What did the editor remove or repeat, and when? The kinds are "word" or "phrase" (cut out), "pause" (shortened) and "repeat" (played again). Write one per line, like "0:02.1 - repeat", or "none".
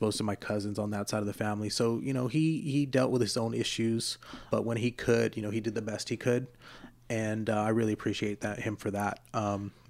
0:04.5 - word